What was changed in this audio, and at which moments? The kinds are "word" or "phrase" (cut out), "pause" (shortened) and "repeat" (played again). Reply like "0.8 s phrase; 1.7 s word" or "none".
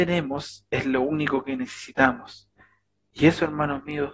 none